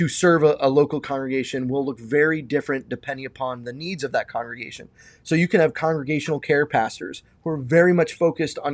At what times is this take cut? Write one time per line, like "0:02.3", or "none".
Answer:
none